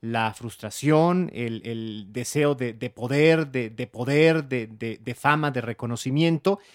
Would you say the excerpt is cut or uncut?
cut